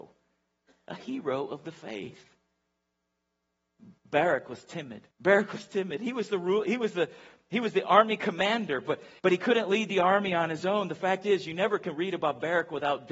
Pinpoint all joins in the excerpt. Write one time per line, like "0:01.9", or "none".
0:04.0
0:05.1
0:09.2